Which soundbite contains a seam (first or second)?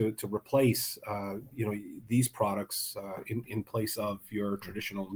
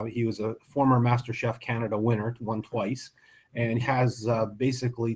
second